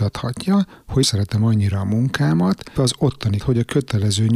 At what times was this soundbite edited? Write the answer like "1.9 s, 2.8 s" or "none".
1.0 s, 2.8 s, 3.4 s